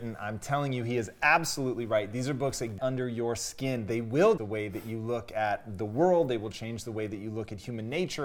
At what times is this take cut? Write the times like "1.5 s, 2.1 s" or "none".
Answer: 2.8 s, 4.4 s